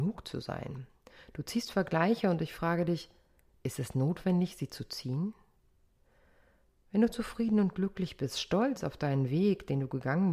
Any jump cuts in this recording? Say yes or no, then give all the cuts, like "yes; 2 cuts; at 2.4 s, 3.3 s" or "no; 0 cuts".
no; 0 cuts